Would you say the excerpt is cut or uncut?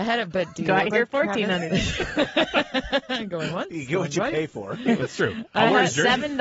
uncut